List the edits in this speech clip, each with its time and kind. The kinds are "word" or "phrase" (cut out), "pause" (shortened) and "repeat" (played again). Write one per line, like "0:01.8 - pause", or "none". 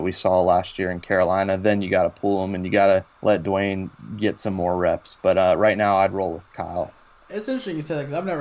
0:03.1 - pause